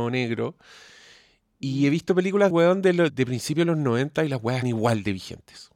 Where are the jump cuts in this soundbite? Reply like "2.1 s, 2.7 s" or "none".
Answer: 2.5 s, 3.1 s, 4.6 s